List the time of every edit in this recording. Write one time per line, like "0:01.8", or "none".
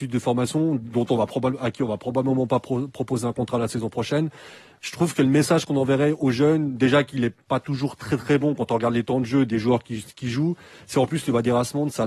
none